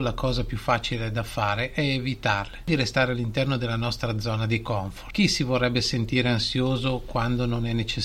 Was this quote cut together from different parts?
no; 0 cuts

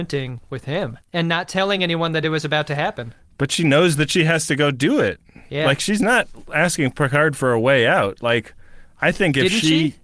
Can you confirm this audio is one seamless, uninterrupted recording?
yes; 0 cuts

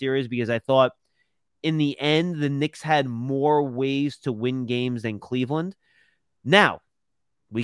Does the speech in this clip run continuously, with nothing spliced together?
yes; 0 cuts

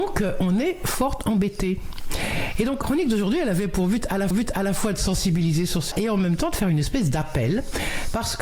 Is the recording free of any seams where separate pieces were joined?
no; 3 cuts; at 2.8 s, 4.3 s, 5.9 s

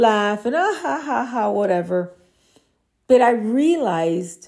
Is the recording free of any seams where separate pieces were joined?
yes; 0 cuts

